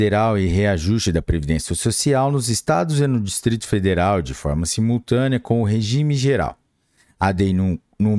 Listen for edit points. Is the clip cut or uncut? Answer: uncut